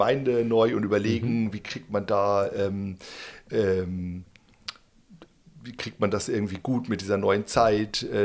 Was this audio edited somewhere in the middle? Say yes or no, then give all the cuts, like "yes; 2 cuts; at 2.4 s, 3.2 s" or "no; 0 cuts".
no; 0 cuts